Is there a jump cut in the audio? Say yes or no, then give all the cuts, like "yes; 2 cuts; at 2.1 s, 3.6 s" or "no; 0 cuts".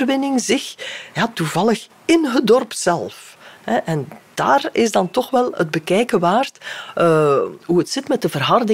no; 0 cuts